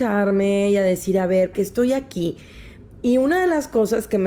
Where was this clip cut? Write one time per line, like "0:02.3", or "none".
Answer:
0:01.5